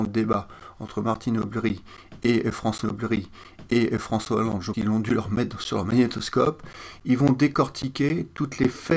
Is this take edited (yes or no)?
yes